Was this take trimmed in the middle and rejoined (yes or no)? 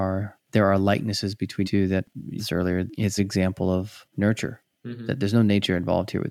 yes